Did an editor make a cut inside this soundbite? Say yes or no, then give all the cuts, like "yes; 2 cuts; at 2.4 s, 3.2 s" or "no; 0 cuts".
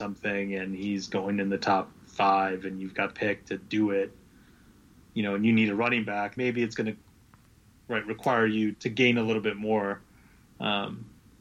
yes; 3 cuts; at 3.1 s, 6.4 s, 8.7 s